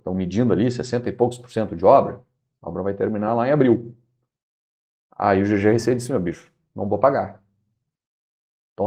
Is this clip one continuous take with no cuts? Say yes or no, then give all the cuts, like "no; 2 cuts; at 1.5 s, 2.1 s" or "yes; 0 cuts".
yes; 0 cuts